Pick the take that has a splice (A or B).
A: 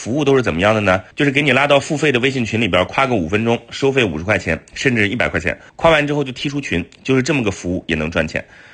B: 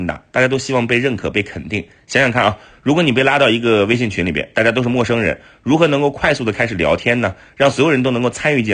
A